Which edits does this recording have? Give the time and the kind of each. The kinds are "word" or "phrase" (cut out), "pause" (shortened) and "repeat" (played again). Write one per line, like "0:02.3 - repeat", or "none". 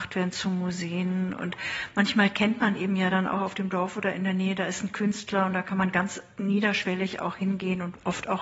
none